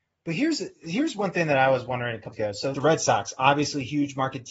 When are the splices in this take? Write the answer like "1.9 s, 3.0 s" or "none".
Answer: 2.3 s, 2.7 s

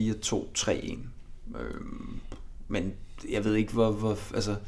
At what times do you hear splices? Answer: none

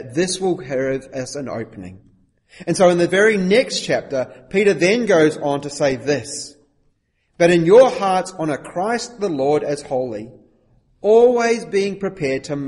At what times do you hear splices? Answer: none

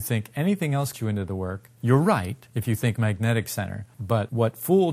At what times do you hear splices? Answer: 0.9 s, 3.0 s

